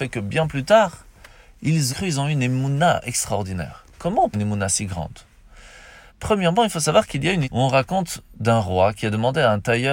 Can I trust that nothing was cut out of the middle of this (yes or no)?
no